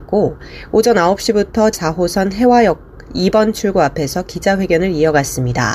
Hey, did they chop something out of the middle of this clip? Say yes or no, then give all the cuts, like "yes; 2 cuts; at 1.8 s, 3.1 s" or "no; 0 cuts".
yes; 1 cut; at 1.7 s